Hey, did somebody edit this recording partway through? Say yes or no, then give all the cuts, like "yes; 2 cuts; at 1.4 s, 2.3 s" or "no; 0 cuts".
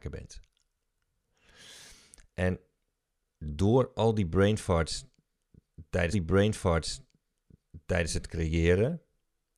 yes; 1 cut; at 6.1 s